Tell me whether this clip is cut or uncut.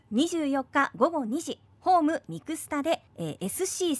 cut